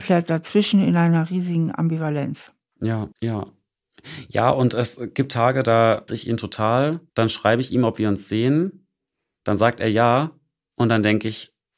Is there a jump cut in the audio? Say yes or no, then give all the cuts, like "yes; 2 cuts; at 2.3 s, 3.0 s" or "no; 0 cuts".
yes; 3 cuts; at 3.1 s, 6.1 s, 7.1 s